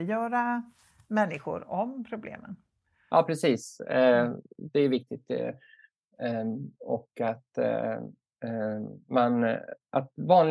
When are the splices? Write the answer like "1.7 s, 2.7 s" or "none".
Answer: none

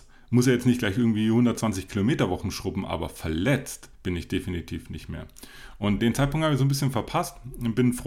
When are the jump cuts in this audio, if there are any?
3.9 s, 6.0 s

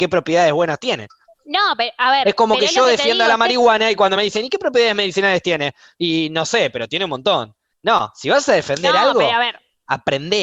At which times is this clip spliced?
none

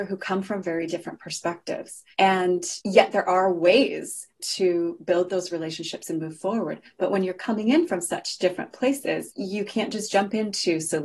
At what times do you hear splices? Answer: 2.1 s

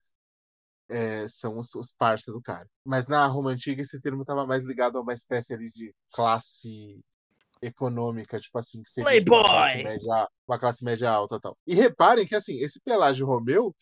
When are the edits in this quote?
2.8 s, 7.3 s, 10.4 s, 11.6 s

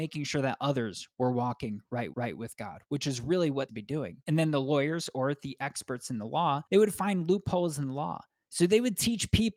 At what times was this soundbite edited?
2.1 s, 3.7 s, 4.2 s, 6.7 s

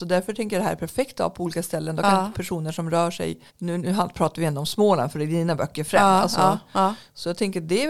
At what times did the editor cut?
3.5 s

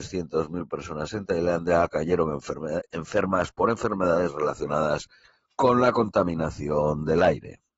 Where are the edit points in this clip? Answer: 5.2 s

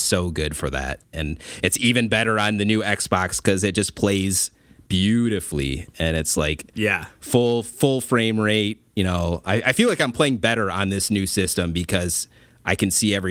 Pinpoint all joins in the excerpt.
none

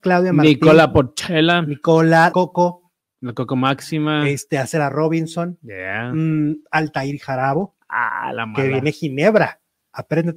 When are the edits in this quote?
2.3 s

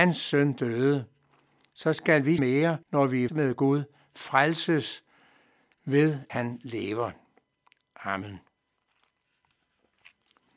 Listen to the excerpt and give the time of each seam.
2.4 s, 2.8 s, 3.3 s, 6.3 s

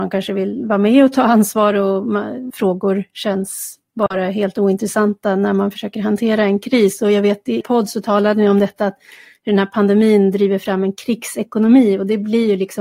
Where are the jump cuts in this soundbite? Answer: 2.5 s, 7.6 s

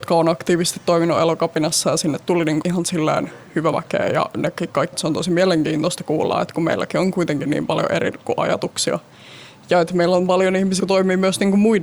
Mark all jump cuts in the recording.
2.6 s, 3.7 s, 4.9 s, 8.2 s, 10.8 s

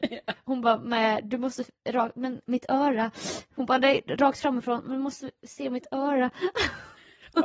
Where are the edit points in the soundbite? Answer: none

